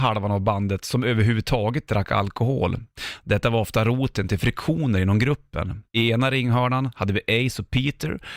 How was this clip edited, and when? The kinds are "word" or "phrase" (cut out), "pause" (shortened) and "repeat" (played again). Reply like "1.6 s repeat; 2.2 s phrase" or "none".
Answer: 5.9 s pause